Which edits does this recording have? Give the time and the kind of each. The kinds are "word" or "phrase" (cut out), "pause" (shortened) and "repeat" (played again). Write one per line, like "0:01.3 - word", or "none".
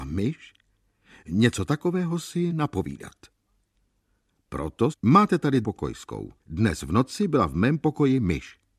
0:02.5 - word
0:04.9 - phrase
0:05.6 - word
0:06.4 - pause